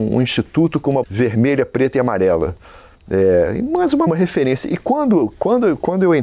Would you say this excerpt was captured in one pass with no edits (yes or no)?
no